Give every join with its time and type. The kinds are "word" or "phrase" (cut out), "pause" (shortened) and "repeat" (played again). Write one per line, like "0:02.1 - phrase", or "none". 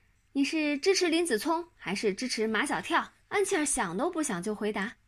0:03.2 - pause